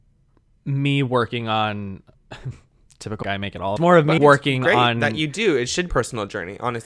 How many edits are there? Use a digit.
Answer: 5